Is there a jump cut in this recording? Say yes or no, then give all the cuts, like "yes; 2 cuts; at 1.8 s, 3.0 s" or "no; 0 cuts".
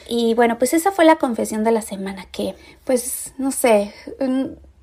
no; 0 cuts